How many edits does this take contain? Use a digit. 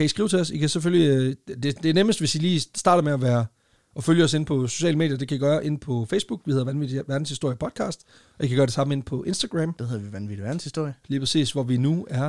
0